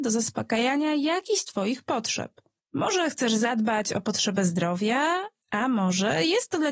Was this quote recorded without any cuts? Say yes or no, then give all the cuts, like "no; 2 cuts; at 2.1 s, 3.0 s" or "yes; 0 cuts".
yes; 0 cuts